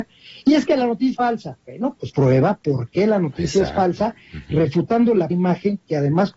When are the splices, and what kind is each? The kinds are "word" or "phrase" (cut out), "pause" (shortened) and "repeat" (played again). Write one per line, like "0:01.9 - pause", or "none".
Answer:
0:01.1 - word
0:01.6 - pause
0:02.1 - word
0:05.3 - word